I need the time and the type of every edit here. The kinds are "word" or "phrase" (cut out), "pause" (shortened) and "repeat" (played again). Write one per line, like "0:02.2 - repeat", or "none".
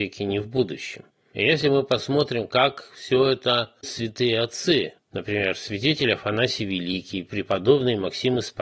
0:01.1 - pause
0:03.8 - word
0:05.0 - pause